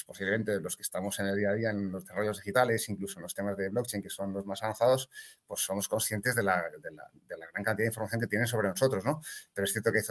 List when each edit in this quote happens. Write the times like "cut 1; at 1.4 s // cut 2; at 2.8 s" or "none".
cut 1; at 7.2 s